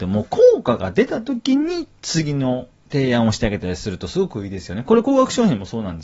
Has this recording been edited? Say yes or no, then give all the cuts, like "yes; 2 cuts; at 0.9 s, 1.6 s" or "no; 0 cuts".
no; 0 cuts